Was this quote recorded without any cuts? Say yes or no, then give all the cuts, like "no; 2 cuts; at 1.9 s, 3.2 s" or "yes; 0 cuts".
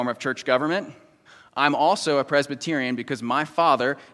no; 1 cut; at 1.3 s